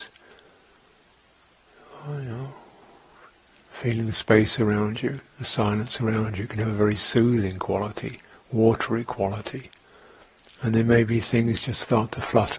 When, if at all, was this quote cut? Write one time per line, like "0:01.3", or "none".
none